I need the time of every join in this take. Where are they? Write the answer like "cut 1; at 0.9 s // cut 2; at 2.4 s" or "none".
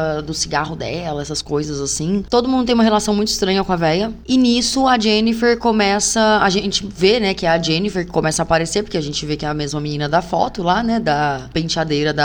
none